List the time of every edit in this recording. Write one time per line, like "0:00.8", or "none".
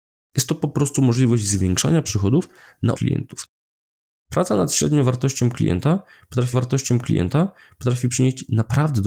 0:02.9
0:06.5